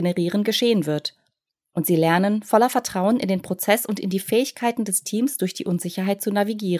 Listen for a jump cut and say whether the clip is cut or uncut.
uncut